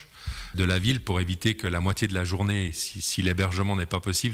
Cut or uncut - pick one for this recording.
uncut